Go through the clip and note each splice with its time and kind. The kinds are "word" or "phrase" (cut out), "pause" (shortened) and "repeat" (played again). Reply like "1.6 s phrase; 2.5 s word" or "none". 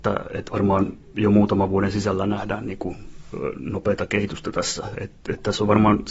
none